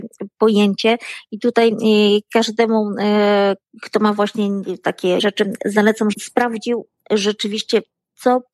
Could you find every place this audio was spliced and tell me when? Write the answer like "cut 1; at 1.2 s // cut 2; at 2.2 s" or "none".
cut 1; at 3.7 s // cut 2; at 5.2 s // cut 3; at 6.1 s